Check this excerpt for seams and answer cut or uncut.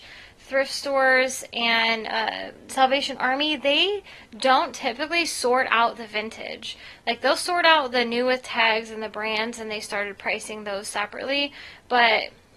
uncut